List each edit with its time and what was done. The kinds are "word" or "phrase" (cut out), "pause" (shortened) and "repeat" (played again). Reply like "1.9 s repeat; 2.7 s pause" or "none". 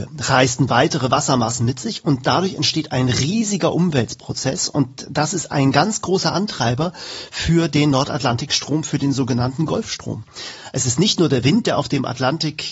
none